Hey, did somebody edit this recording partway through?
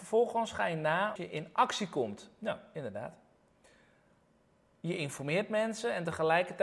yes; 1 cut; at 1.2 s

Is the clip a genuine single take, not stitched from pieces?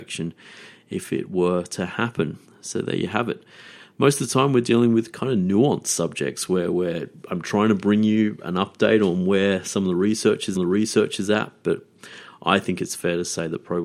no; 2 cuts; at 2.4 s, 10.5 s

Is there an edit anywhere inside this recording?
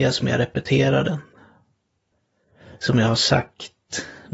no; 0 cuts

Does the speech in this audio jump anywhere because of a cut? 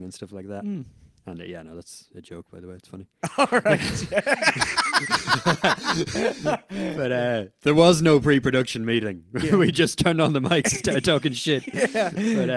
no; 0 cuts

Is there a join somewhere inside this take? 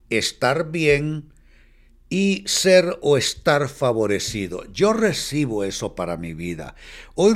no; 0 cuts

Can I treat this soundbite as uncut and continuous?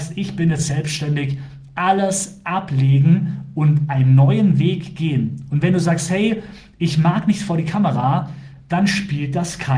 yes; 0 cuts

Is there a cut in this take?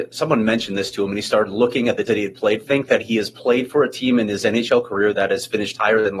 yes; 2 cuts; at 2.1 s, 2.6 s

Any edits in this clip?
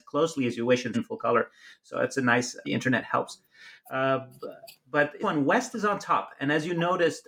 yes; 3 cuts; at 0.9 s, 2.6 s, 5.2 s

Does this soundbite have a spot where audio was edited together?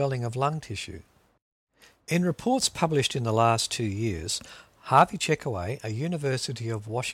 no; 0 cuts

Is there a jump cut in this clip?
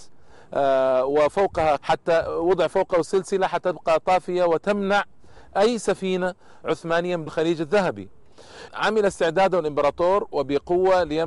yes; 3 cuts; at 1.8 s, 7.3 s, 8.7 s

